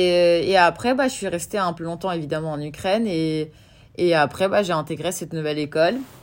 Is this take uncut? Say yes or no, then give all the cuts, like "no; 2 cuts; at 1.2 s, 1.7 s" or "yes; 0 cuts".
no; 1 cut; at 1.8 s